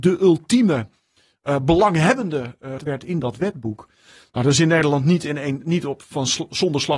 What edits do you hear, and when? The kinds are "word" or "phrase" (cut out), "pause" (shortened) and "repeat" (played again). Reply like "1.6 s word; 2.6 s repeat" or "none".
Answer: 2.8 s word